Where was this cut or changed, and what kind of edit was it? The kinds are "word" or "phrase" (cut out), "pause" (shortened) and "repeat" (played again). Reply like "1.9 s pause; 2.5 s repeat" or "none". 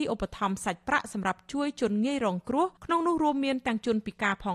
2.8 s pause